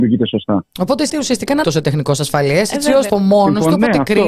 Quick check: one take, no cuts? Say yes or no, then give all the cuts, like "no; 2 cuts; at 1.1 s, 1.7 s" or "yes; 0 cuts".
no; 3 cuts; at 1.1 s, 1.6 s, 3.1 s